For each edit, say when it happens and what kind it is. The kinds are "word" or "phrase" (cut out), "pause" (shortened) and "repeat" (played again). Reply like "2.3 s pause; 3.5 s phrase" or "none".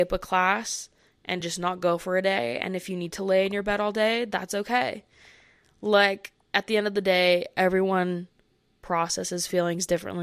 none